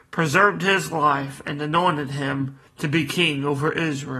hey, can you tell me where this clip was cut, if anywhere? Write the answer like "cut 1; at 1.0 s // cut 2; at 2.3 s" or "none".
cut 1; at 2.7 s